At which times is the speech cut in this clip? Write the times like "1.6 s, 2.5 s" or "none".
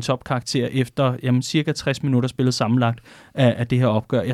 none